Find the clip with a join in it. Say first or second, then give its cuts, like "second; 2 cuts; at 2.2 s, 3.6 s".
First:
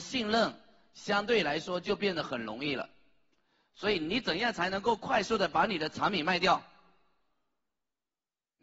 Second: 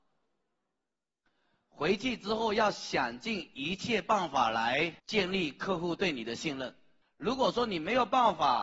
second; 2 cuts; at 5.0 s, 7.0 s